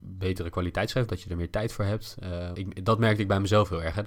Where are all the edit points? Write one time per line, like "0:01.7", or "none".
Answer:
0:01.1
0:02.5